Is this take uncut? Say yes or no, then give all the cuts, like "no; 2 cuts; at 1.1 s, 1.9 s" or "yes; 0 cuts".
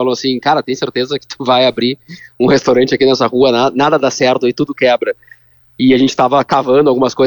yes; 0 cuts